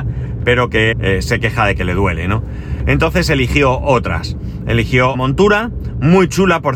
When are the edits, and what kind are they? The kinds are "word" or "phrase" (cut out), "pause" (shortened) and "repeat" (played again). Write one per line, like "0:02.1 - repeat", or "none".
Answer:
0:00.9 - word
0:05.1 - word